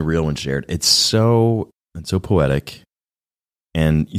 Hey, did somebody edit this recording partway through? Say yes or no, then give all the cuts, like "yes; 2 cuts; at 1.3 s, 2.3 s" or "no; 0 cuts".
yes; 1 cut; at 1.9 s